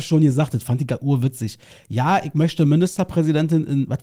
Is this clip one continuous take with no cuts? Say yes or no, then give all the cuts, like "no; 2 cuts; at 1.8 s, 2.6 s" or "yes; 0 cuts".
yes; 0 cuts